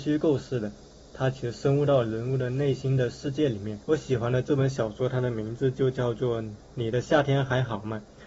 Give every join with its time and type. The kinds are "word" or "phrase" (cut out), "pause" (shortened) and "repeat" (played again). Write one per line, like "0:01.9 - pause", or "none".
0:03.8 - pause